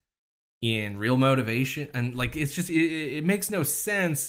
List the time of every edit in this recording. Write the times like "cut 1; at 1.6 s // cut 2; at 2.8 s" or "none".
none

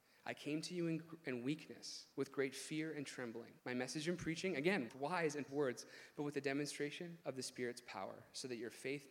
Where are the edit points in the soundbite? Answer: cut 1; at 2.1 s // cut 2; at 3.6 s // cut 3; at 4.9 s // cut 4; at 5.5 s // cut 5; at 7.2 s

